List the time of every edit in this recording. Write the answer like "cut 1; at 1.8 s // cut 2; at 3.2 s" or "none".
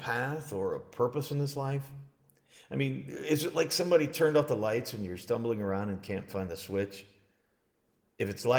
none

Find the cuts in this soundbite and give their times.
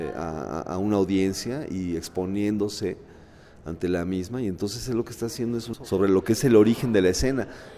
cut 1; at 5.7 s

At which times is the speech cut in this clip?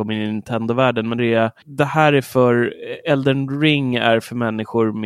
cut 1; at 1.2 s // cut 2; at 1.6 s

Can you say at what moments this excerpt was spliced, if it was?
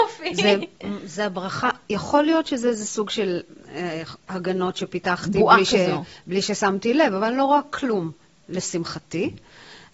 none

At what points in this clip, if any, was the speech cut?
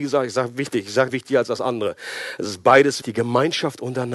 cut 1; at 1.1 s // cut 2; at 3.0 s

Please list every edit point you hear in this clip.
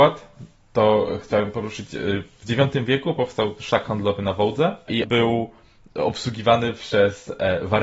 cut 1; at 5.0 s

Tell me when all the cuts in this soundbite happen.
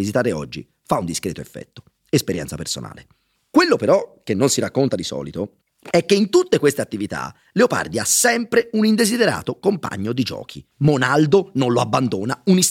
cut 1; at 3.3 s // cut 2; at 5.6 s // cut 3; at 10.7 s

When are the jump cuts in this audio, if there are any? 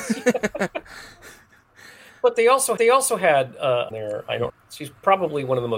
cut 1; at 2.8 s // cut 2; at 3.9 s // cut 3; at 4.5 s

